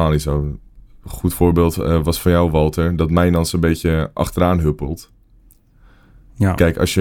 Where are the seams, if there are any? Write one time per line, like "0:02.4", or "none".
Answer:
none